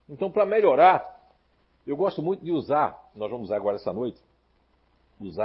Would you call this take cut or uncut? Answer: uncut